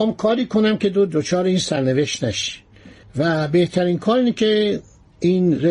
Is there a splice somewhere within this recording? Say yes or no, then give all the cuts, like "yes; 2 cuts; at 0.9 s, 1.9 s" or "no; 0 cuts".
no; 0 cuts